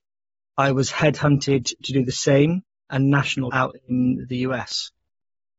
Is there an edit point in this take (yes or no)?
yes